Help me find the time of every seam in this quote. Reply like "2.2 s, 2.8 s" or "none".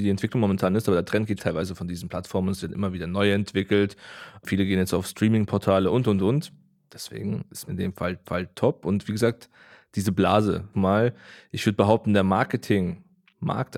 1.4 s, 7.7 s, 8.2 s, 10.7 s